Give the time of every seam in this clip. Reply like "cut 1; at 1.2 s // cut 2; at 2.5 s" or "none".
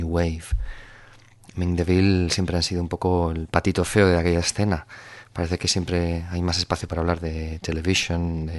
none

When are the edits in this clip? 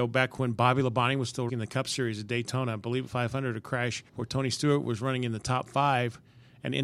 cut 1; at 1.5 s // cut 2; at 3.1 s // cut 3; at 4.1 s

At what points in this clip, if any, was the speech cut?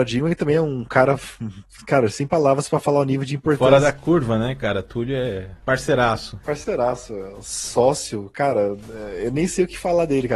none

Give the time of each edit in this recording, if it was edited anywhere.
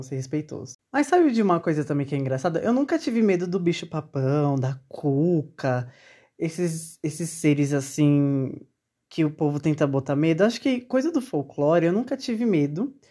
none

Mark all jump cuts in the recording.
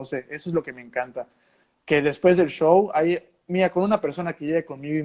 none

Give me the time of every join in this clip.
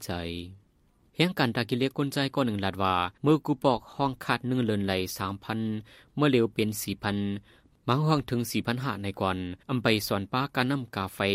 cut 1; at 3.2 s // cut 2; at 9.6 s

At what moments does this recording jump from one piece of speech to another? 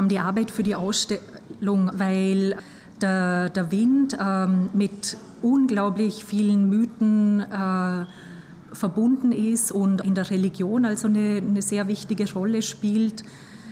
cut 1; at 1.9 s // cut 2; at 10.0 s

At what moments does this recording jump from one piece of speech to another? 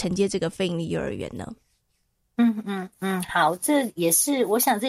none

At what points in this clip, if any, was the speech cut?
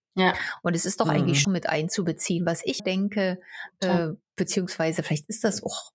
cut 1; at 1.4 s // cut 2; at 2.8 s

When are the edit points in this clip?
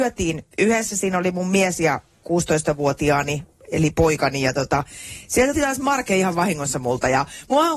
cut 1; at 5.5 s

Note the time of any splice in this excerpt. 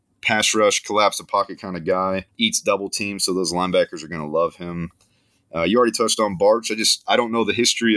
cut 1; at 2.3 s

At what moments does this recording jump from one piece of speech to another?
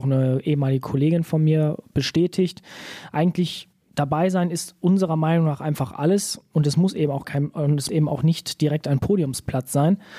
cut 1; at 7.2 s // cut 2; at 7.9 s

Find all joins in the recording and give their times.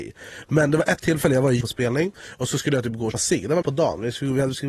cut 1; at 1.6 s // cut 2; at 3.1 s // cut 3; at 3.6 s

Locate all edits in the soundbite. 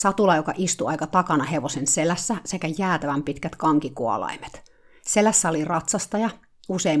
none

